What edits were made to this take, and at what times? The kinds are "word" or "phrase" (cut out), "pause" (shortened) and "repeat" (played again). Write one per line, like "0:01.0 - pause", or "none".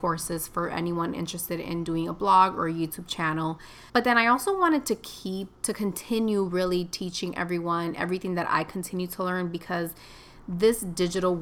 0:03.9 - pause
0:05.6 - pause